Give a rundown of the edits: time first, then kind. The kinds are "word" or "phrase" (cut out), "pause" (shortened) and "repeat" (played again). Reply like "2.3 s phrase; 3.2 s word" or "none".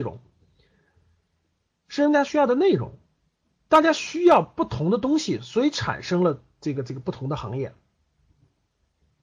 none